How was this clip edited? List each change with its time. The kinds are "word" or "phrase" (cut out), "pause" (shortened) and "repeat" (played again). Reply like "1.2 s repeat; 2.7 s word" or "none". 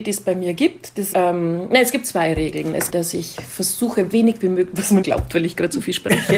1.1 s word; 2.9 s phrase; 4.1 s word; 5.0 s word